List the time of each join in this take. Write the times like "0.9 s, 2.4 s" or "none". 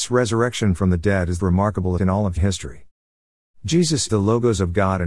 1.4 s, 2.0 s, 2.4 s, 4.1 s